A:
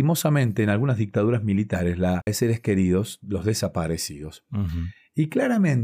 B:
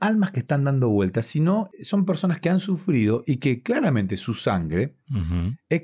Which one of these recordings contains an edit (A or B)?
A